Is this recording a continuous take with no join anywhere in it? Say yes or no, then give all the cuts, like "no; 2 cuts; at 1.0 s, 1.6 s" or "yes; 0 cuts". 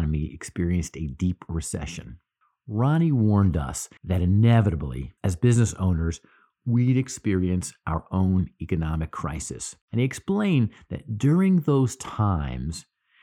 no; 4 cuts; at 2.4 s, 4.0 s, 5.2 s, 9.8 s